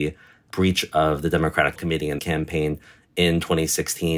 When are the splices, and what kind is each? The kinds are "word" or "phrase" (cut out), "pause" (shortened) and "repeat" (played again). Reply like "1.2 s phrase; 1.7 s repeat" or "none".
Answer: 1.8 s word; 2.2 s phrase